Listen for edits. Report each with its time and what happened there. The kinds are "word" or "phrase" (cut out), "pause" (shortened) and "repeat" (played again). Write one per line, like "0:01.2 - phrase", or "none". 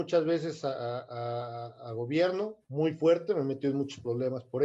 0:02.6 - pause